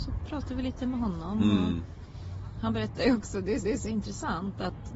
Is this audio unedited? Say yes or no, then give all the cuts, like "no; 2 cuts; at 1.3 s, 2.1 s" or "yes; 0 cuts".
no; 1 cut; at 3.6 s